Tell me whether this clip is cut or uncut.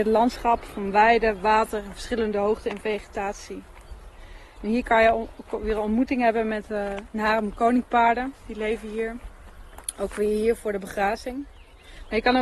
uncut